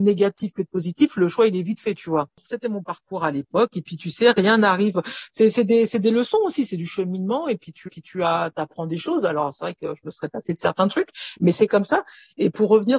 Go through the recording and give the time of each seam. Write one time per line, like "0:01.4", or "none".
0:07.9